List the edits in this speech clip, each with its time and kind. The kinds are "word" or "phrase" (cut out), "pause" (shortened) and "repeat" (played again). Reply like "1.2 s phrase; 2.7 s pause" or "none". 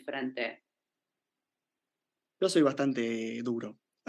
none